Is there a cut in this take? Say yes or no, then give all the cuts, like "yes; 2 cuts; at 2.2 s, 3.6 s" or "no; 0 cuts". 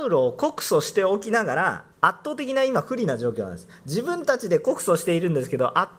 yes; 1 cut; at 1.9 s